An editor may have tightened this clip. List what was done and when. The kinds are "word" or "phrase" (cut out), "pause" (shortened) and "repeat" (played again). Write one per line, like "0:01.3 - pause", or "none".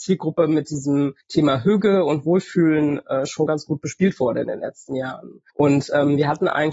0:01.2 - pause
0:05.5 - pause